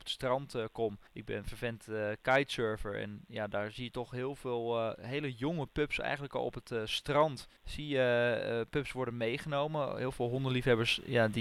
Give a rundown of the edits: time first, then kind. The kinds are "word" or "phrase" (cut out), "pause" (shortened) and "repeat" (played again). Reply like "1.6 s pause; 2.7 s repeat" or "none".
1.1 s pause; 7.6 s pause

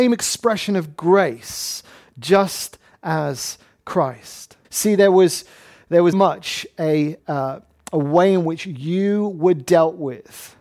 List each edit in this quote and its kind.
4.6 s pause; 6.1 s word; 7.2 s word

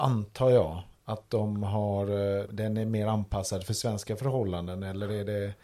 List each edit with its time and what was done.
2.5 s word

